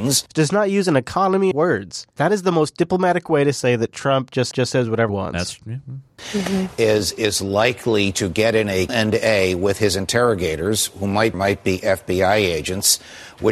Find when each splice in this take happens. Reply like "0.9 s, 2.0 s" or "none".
1.5 s, 2.1 s, 4.5 s, 5.1 s, 8.9 s, 11.3 s